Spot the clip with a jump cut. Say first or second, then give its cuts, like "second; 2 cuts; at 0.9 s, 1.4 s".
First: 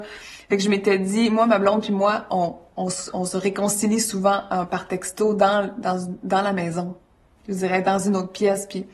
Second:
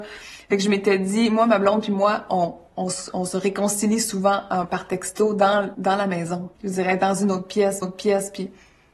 second; 3 cuts; at 5.7 s, 6.6 s, 7.8 s